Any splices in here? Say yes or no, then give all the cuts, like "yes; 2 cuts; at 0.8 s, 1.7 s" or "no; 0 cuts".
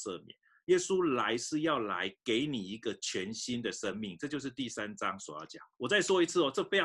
yes; 1 cut; at 5.7 s